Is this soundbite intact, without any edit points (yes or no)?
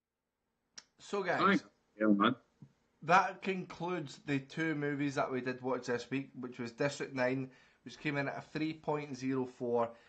yes